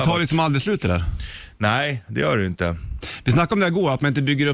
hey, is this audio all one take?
yes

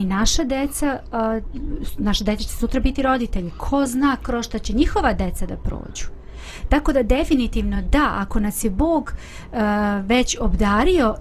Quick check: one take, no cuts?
yes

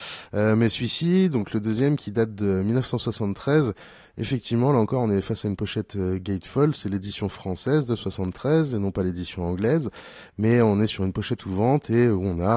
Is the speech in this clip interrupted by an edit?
no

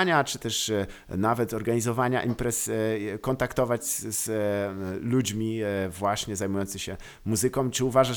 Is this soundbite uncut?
yes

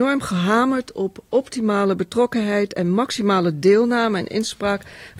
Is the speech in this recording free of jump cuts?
yes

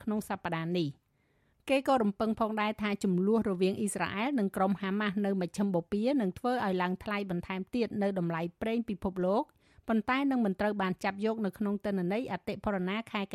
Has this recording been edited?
no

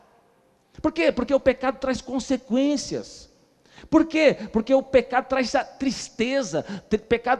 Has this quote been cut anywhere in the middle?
no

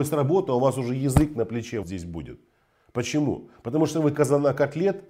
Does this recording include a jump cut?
yes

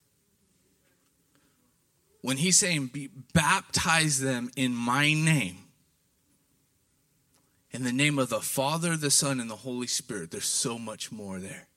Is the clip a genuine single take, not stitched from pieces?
yes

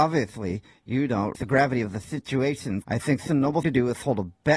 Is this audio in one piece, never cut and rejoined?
no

